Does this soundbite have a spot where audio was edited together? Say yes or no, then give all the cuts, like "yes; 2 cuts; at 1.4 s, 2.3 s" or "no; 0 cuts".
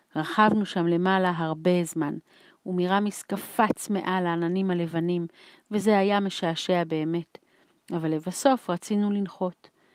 no; 0 cuts